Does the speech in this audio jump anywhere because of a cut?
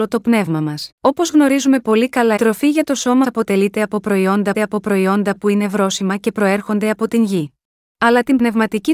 yes; 5 cuts; at 0.9 s, 2.4 s, 3.2 s, 4.5 s, 7.7 s

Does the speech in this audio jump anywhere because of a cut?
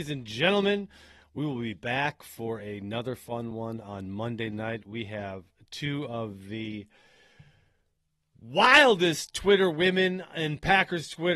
no; 0 cuts

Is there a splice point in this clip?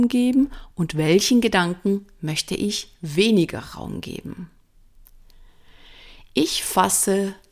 no; 0 cuts

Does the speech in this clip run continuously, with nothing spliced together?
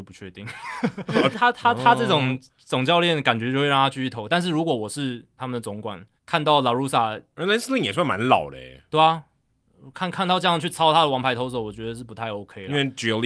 no; 3 cuts; at 1.3 s, 5.4 s, 6.2 s

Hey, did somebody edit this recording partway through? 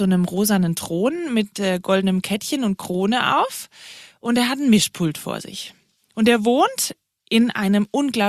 no; 0 cuts

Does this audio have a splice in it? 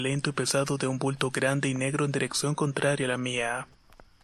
no; 0 cuts

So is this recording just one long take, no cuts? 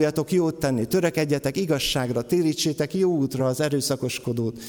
yes; 0 cuts

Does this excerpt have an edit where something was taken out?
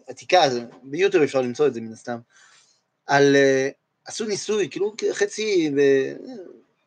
no; 0 cuts

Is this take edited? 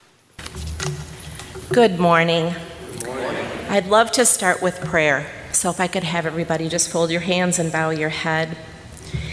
no; 0 cuts

